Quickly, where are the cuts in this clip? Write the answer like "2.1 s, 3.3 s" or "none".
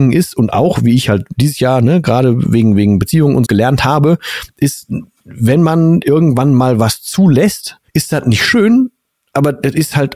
3.4 s, 7.9 s